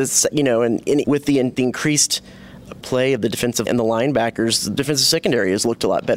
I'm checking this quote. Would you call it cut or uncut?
cut